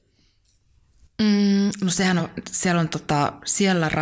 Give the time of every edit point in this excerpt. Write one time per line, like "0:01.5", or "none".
none